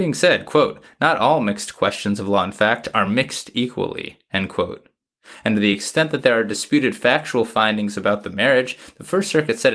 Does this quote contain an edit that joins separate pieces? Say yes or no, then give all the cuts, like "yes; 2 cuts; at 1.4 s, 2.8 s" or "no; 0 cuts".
no; 0 cuts